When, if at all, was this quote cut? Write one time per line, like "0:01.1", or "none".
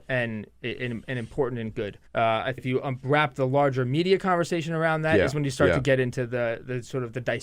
0:02.1
0:02.6

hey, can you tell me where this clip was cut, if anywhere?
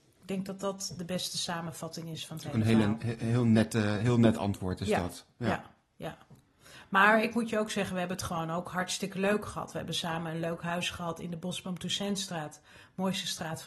none

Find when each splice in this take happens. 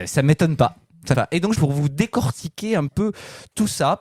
0:01.1
0:01.6
0:02.9

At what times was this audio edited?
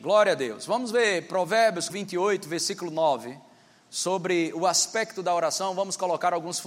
0:01.9

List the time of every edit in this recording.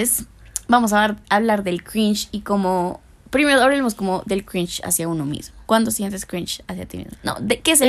0:05.7

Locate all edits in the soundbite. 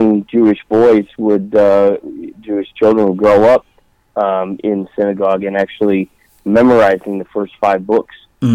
none

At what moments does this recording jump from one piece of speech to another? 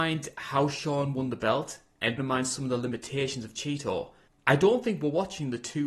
0:02.2
0:04.3

